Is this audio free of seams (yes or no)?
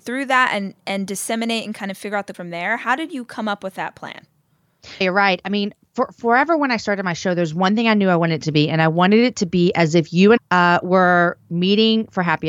no